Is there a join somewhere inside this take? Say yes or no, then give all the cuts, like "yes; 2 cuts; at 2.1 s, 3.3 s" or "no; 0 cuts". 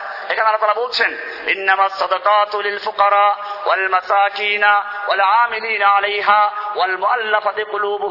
no; 0 cuts